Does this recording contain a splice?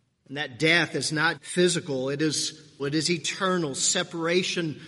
yes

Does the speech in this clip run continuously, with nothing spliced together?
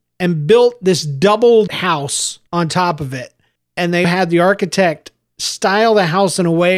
no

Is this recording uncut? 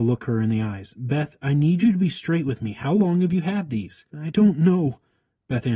no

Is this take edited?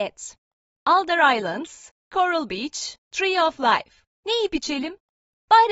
yes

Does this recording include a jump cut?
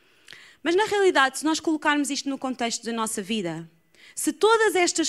no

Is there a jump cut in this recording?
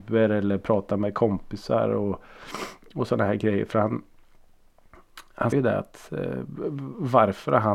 yes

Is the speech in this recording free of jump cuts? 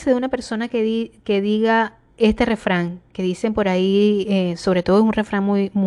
yes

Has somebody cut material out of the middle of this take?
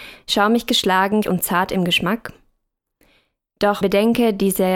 yes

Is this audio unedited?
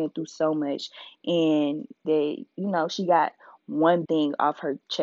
no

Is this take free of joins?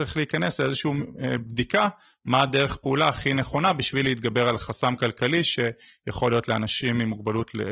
yes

